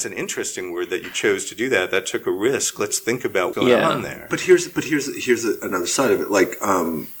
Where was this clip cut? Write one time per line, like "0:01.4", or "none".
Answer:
0:03.5